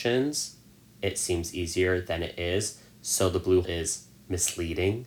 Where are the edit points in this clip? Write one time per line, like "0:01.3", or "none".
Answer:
0:03.6